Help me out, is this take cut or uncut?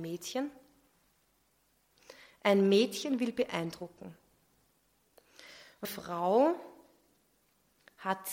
cut